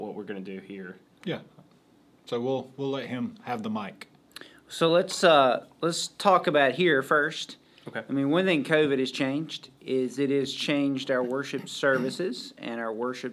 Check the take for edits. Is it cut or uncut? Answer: uncut